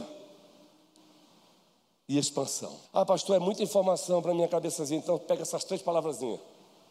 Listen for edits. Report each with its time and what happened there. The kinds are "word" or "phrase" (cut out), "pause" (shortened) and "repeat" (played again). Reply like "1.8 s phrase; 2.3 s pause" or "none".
2.9 s pause